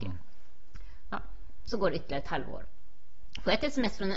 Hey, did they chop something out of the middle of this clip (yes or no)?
no